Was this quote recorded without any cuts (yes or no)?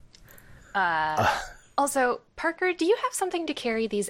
yes